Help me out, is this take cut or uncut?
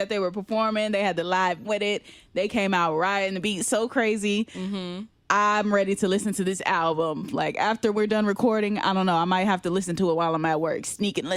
cut